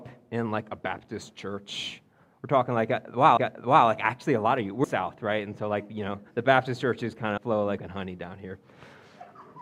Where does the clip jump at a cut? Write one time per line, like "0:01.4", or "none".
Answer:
0:03.4
0:04.8
0:06.3
0:07.4
0:07.8